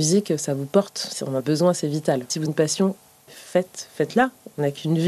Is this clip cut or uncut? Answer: cut